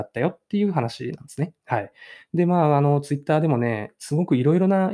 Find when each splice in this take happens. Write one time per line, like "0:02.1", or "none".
0:01.6